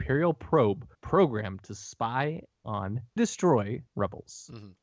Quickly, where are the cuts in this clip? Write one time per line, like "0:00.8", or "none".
0:00.9
0:03.2
0:03.9

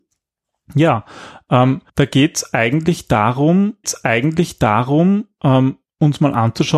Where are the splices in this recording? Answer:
0:01.9
0:03.8

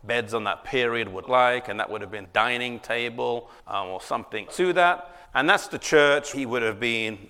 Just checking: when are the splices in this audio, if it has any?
0:01.2
0:02.3
0:03.6
0:04.5
0:05.3
0:06.3

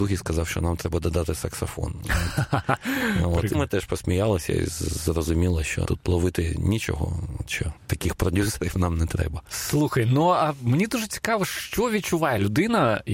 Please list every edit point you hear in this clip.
0:03.5
0:05.8
0:07.8

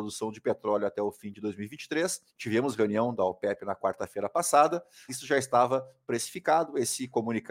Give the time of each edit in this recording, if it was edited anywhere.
0:02.3
0:05.1

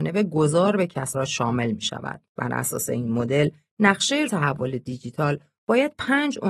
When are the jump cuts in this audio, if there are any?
0:01.1
0:02.3
0:04.3

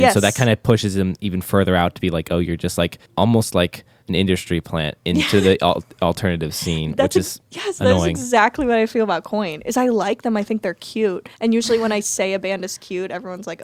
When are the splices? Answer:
0:03.1
0:04.0
0:11.3

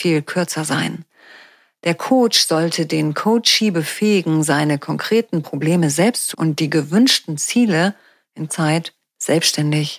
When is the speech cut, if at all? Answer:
0:06.3
0:08.5

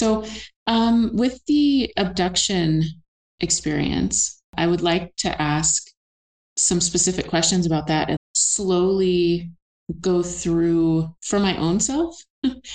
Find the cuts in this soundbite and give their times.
0:04.5
0:08.2
0:11.2

